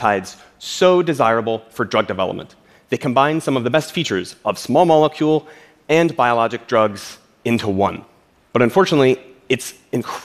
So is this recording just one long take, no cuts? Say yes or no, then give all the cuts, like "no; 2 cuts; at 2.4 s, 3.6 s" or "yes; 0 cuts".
yes; 0 cuts